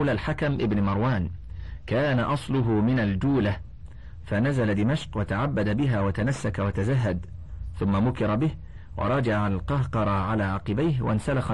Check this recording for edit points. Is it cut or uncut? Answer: uncut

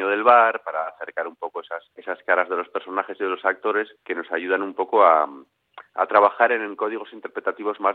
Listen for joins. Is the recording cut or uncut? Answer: cut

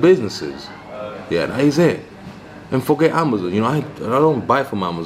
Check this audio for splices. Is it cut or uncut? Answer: uncut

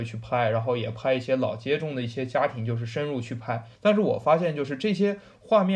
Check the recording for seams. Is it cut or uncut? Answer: cut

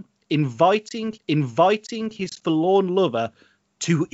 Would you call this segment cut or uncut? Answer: cut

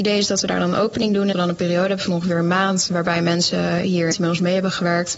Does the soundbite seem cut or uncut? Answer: cut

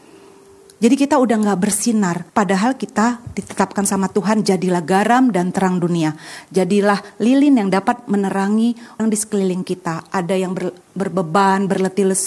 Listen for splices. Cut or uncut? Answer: cut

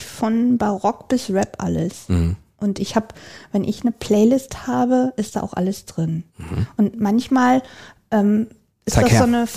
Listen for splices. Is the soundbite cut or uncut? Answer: cut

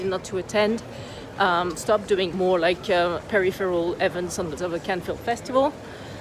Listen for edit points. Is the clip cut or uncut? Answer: cut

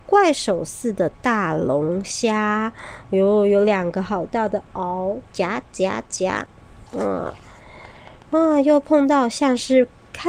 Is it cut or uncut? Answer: cut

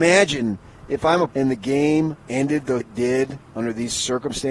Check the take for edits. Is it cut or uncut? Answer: cut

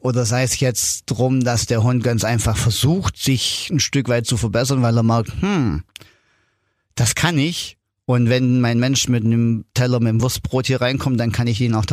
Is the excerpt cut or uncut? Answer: uncut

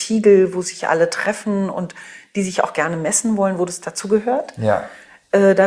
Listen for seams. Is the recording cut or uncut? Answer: uncut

